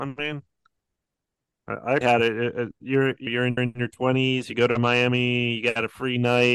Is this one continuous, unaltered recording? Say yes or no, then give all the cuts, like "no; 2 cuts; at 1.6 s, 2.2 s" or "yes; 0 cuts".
no; 3 cuts; at 2.0 s, 3.3 s, 3.6 s